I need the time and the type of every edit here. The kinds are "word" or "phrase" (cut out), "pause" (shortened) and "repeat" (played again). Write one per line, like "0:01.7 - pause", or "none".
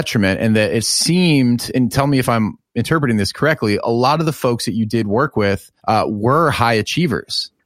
0:05.8 - pause